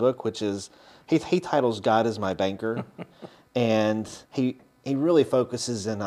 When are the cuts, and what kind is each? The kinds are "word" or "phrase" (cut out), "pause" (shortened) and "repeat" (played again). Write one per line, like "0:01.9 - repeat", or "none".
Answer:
0:04.3 - pause